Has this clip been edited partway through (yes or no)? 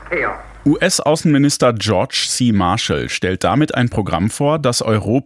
no